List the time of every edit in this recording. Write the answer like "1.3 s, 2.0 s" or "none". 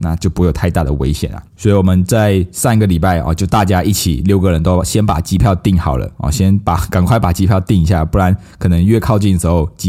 1.5 s